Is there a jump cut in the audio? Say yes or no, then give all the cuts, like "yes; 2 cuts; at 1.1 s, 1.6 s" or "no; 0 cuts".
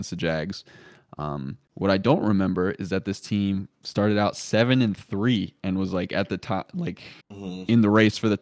yes; 2 cuts; at 1.6 s, 7.2 s